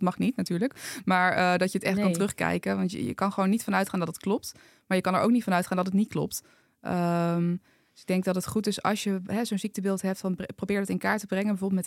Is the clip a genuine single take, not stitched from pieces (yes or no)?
yes